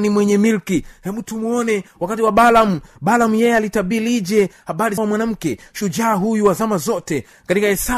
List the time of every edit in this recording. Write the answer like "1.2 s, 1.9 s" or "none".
5.0 s

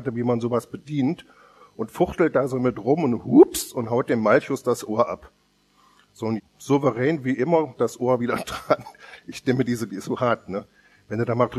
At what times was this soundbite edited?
6.4 s, 7.8 s, 9.9 s

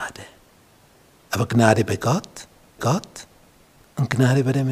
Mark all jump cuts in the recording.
2.8 s

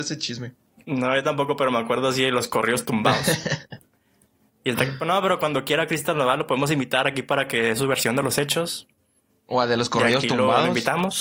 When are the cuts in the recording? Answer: none

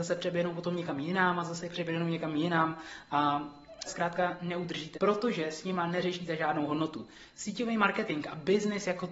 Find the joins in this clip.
3.9 s, 4.9 s

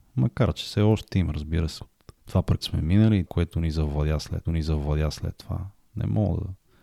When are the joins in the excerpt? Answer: 1.8 s, 2.2 s, 2.6 s, 3.3 s, 4.4 s

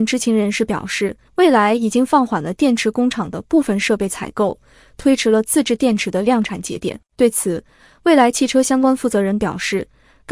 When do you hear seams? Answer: 1.3 s, 7.1 s

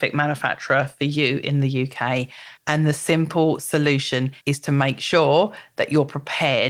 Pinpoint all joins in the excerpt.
2.6 s, 4.4 s

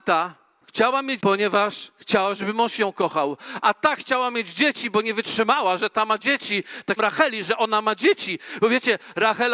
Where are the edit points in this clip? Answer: 1.2 s, 7.0 s

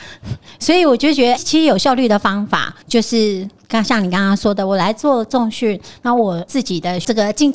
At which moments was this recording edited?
1.4 s, 2.8 s

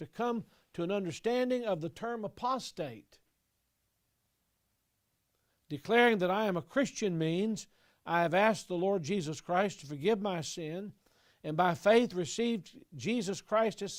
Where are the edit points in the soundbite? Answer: none

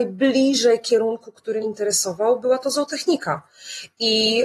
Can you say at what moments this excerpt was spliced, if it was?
1.6 s

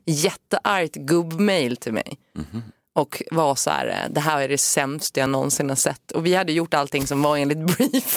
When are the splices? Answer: none

